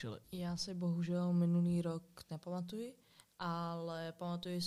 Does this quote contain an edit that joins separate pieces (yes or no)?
yes